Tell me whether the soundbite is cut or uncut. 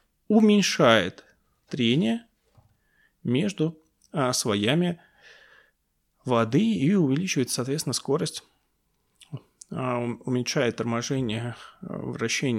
uncut